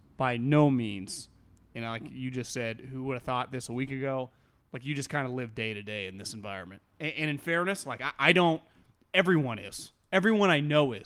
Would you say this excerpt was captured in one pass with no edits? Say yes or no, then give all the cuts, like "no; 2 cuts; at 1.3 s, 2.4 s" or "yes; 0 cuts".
yes; 0 cuts